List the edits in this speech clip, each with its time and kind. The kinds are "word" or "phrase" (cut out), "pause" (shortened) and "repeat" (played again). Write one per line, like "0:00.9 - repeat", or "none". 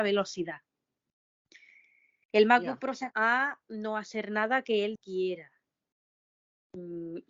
0:03.1 - word
0:05.0 - word